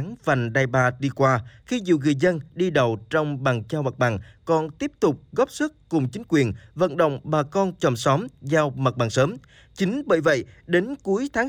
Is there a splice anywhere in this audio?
no; 0 cuts

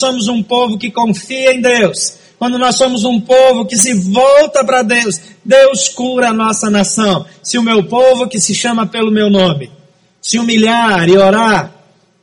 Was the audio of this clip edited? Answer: no; 0 cuts

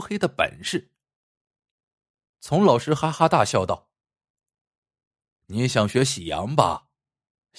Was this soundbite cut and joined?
no; 0 cuts

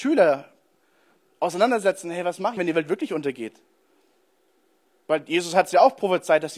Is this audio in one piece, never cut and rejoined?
no; 1 cut; at 2.6 s

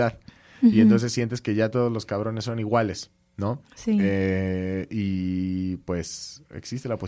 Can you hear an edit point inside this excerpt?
yes; 1 cut; at 3.6 s

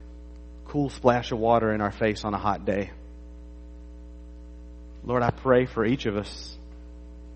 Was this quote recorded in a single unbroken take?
yes; 0 cuts

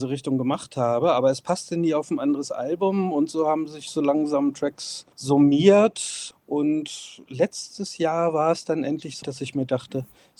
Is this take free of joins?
no; 2 cuts; at 5.1 s, 9.2 s

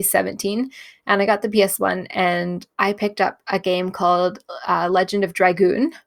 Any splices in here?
yes; 1 cut; at 2.7 s

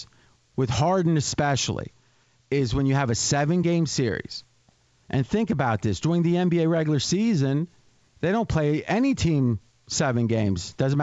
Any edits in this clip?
no; 0 cuts

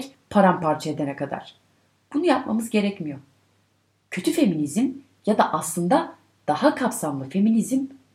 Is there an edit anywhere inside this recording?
no; 0 cuts

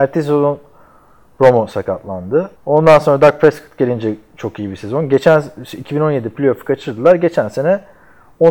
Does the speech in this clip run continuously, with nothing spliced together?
no; 1 cut; at 2.6 s

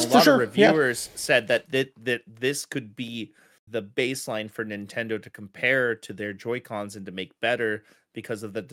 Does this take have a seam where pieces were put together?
yes; 1 cut; at 3.7 s

